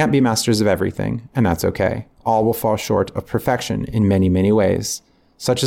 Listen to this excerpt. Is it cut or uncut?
cut